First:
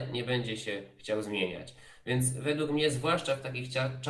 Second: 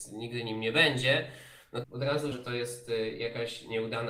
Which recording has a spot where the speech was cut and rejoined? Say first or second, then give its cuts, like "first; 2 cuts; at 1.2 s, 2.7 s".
second; 2 cuts; at 1.8 s, 2.3 s